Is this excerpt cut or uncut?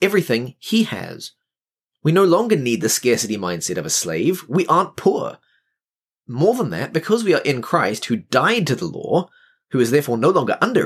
uncut